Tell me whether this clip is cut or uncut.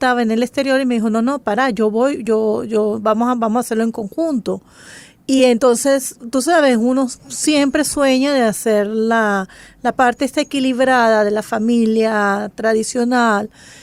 uncut